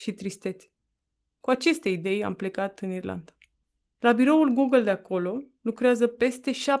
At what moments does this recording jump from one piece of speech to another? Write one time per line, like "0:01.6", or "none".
none